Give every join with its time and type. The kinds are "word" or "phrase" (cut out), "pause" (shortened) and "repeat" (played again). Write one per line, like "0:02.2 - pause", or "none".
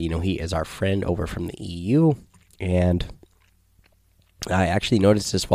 none